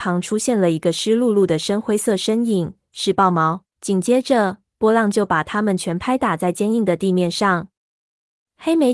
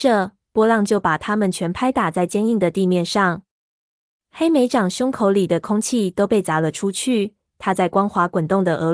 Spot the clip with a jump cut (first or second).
first